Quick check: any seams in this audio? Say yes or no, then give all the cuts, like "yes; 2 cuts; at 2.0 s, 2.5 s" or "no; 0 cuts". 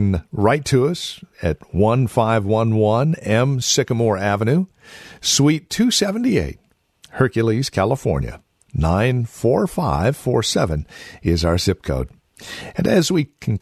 no; 0 cuts